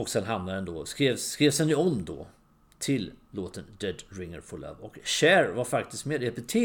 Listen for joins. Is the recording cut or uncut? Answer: uncut